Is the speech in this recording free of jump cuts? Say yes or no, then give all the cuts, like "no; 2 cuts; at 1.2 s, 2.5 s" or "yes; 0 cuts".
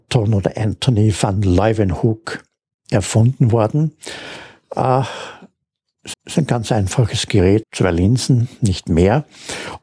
no; 2 cuts; at 6.1 s, 7.6 s